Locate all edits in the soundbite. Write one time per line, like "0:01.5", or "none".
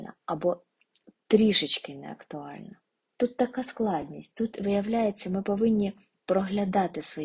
none